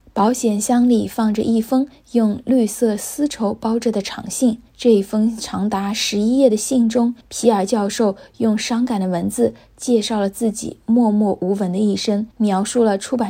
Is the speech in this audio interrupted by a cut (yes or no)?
yes